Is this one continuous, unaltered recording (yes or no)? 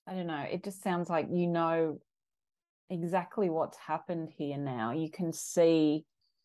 yes